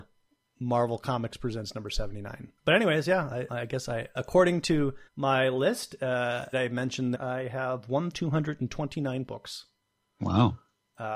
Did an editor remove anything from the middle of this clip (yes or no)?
yes